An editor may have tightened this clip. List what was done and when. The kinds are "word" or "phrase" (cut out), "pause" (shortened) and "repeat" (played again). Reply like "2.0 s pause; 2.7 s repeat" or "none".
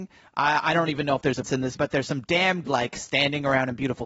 1.4 s word; 1.8 s word; 2.6 s word